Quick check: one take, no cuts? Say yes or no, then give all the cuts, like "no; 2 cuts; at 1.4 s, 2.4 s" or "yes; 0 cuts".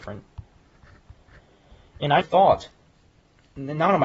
no; 1 cut; at 2.2 s